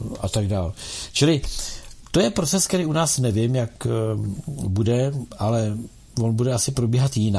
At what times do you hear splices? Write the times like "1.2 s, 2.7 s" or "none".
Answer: none

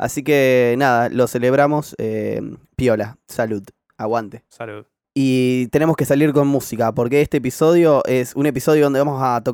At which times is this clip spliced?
none

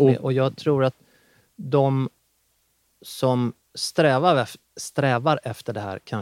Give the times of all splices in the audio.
none

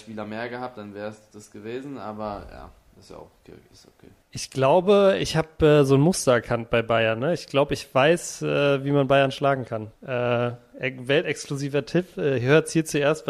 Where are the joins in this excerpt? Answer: 4.2 s, 10.0 s

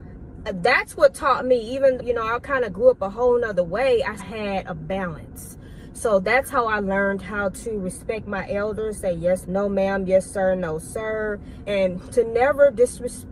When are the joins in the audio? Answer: 2.0 s, 4.2 s, 9.4 s, 11.7 s

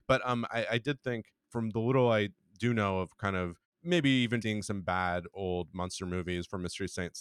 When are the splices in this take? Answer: 4.4 s

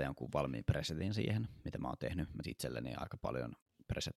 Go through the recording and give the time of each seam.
2.4 s

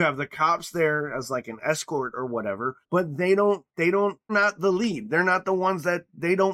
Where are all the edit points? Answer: 2.8 s, 3.7 s, 4.3 s

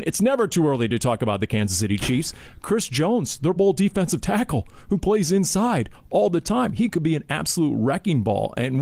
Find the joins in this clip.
3.6 s

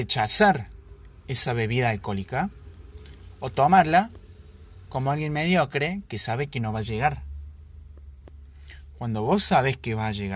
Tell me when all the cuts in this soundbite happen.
none

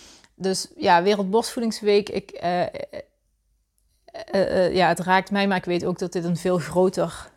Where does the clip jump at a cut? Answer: none

